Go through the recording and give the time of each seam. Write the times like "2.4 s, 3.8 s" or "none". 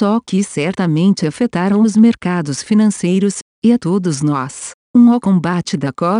none

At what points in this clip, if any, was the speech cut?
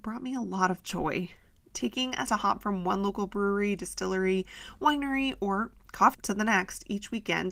1.6 s, 2.3 s, 6.1 s

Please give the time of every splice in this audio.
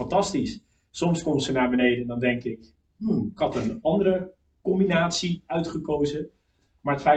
none

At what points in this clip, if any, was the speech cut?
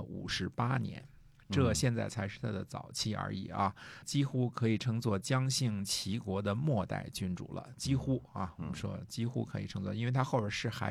4.0 s

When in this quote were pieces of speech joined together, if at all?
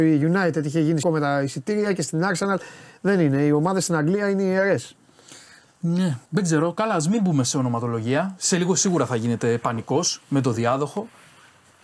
1.0 s, 6.3 s, 10.2 s

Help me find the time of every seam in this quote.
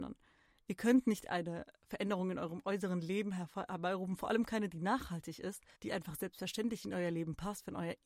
5.7 s

